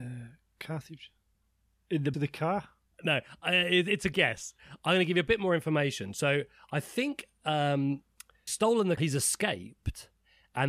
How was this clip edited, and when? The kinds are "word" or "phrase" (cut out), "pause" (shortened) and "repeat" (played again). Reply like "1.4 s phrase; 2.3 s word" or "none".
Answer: 2.1 s word; 4.1 s word; 8.5 s word; 9.0 s word